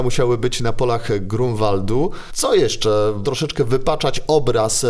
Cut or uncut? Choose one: cut